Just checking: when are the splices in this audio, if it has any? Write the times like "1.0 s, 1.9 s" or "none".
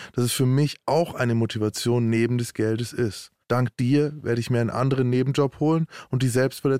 none

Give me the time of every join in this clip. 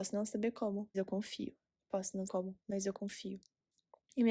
0.9 s, 2.3 s

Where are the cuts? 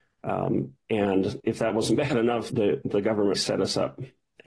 1.4 s, 2.5 s, 2.8 s, 3.3 s

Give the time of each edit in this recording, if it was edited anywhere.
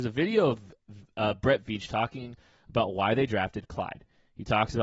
none

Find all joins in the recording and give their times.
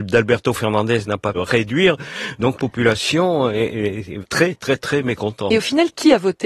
1.3 s, 2.6 s, 4.2 s

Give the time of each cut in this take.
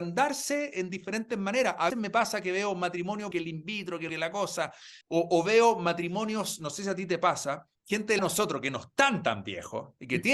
1.9 s, 3.3 s, 4.1 s, 5.0 s, 7.8 s, 8.2 s

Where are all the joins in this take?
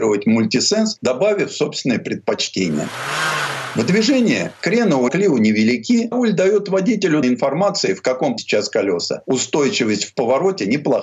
5.1 s, 6.1 s, 7.2 s, 8.4 s

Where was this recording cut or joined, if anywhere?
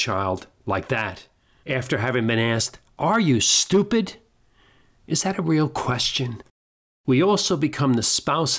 none

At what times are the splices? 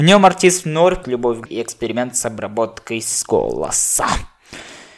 1.0 s, 1.5 s

